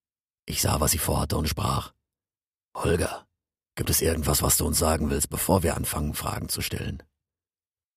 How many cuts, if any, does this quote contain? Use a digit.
0